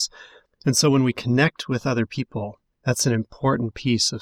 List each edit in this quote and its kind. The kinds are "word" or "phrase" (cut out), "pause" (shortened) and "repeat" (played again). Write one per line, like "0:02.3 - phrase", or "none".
none